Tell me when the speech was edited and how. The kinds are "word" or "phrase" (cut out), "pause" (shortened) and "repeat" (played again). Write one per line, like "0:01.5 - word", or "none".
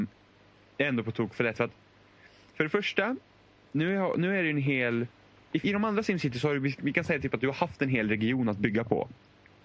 0:05.6 - word

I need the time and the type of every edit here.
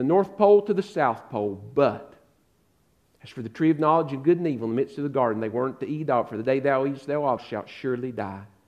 0:07.4 - word

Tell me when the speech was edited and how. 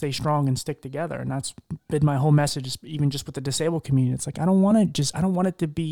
none

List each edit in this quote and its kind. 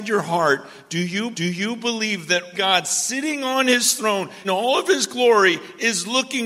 0:01.3 - repeat
0:02.5 - word
0:04.4 - word

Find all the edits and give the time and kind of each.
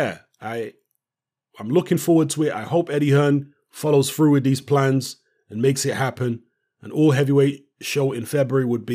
none

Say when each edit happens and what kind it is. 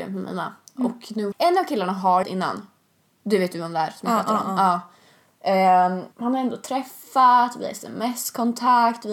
0:01.3 - phrase
0:02.2 - phrase
0:06.1 - pause

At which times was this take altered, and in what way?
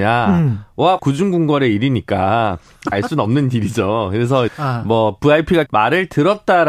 0:01.0 - phrase
0:02.9 - word
0:04.5 - word
0:05.7 - word

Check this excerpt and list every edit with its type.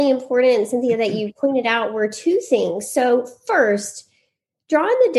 none

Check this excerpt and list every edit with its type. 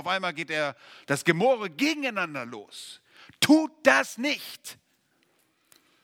none

